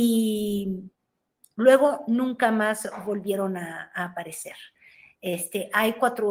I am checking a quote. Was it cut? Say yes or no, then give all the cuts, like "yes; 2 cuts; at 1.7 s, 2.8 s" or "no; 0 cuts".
no; 0 cuts